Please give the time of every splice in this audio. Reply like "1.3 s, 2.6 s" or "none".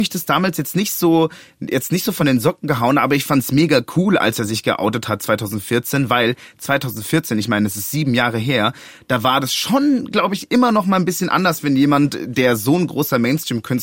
none